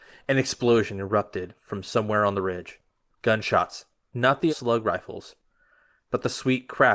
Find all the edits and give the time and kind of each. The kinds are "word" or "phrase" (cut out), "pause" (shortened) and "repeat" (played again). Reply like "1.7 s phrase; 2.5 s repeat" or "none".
4.5 s phrase